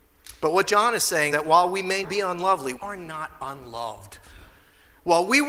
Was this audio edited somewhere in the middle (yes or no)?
yes